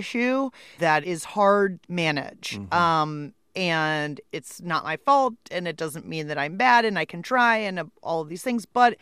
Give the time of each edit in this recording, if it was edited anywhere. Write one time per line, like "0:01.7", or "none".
0:01.0
0:01.8
0:04.2